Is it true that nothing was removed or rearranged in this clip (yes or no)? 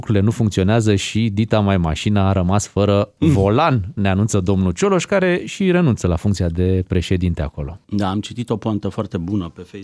no